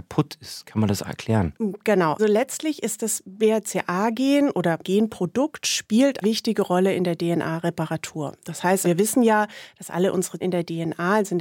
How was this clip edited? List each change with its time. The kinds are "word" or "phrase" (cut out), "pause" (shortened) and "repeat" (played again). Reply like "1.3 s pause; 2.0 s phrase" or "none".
1.0 s word; 2.2 s word; 4.8 s word; 6.2 s word; 8.8 s word; 10.4 s word